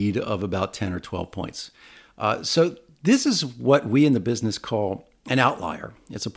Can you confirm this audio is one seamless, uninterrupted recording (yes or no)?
yes